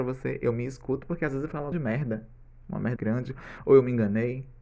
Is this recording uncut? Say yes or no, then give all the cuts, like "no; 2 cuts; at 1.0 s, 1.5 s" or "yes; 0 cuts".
no; 2 cuts; at 1.7 s, 3.0 s